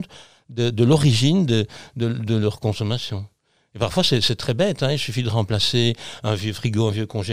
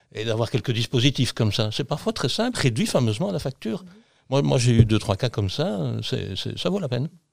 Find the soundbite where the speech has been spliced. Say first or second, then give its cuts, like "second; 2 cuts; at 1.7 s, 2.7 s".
second; 1 cut; at 2.5 s